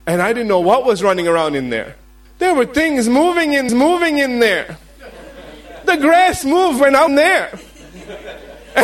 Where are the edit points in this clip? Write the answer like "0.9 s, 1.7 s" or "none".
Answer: 2.2 s, 3.7 s, 7.1 s